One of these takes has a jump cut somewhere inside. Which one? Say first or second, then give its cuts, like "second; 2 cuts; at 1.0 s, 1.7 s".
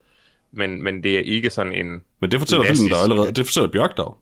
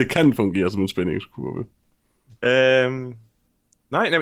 first; 1 cut; at 2.1 s